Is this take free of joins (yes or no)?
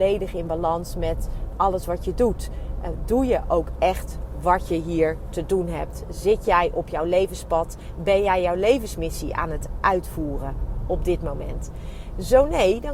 yes